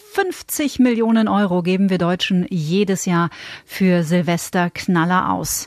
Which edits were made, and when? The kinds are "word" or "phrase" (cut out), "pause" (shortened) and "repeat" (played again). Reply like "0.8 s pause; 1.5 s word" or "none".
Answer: none

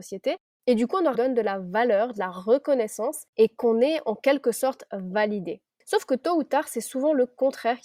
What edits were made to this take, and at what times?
1.1 s phrase; 3.3 s pause

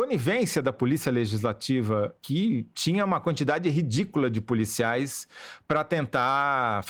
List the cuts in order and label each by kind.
none

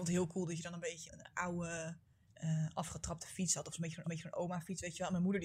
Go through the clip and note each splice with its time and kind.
1.0 s word; 2.3 s pause; 4.0 s repeat

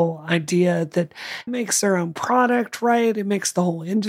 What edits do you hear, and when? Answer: 1.5 s word

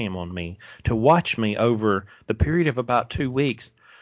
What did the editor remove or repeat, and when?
none

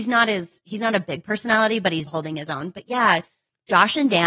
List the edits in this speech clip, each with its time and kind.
2.1 s word

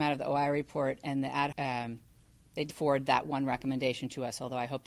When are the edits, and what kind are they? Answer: 1.5 s word; 2.7 s word

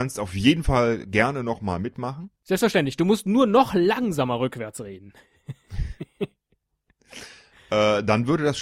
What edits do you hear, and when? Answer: 2.4 s pause

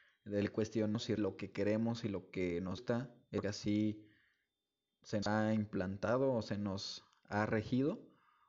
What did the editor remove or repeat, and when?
1.2 s word; 5.2 s word

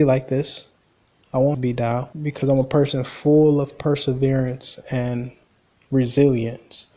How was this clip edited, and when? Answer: 1.5 s word; 2.1 s pause

